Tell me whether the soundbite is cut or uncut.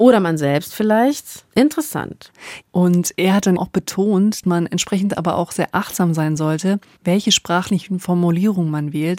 cut